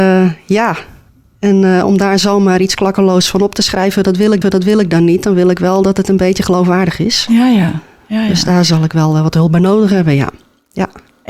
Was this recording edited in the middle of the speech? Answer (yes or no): yes